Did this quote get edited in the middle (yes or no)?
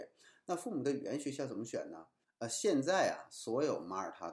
yes